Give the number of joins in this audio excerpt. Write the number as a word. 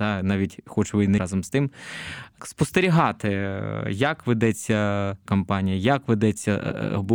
three